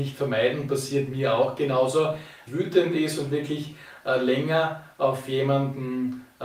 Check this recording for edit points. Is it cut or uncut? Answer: cut